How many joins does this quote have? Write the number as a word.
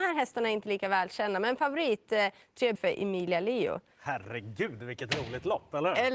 one